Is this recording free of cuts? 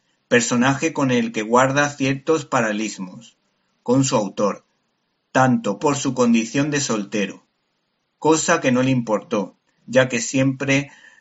no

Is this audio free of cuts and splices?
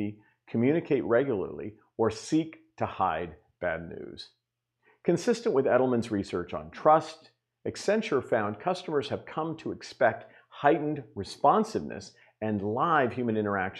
yes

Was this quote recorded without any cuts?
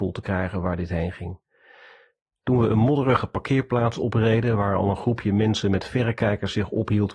yes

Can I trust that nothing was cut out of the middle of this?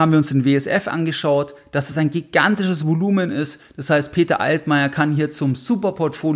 yes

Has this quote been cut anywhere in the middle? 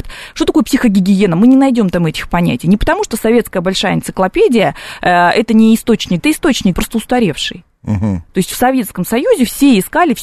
yes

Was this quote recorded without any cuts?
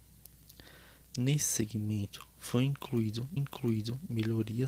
no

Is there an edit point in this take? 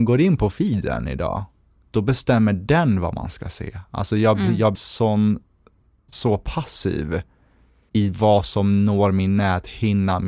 yes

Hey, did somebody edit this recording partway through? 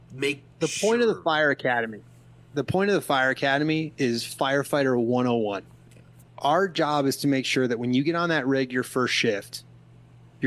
no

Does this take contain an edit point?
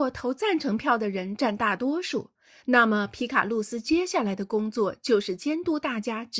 no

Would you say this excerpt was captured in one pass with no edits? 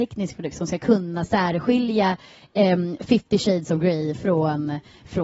yes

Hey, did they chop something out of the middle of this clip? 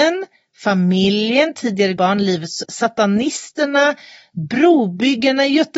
yes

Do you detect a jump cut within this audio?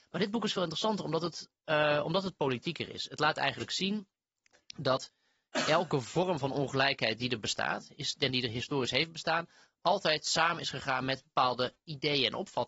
no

